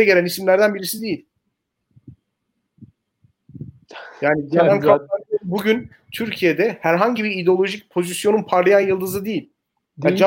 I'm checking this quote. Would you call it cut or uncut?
uncut